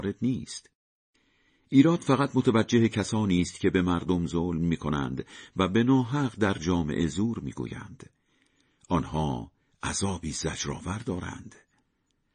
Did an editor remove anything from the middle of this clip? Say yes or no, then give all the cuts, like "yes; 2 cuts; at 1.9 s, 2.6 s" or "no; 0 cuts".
no; 0 cuts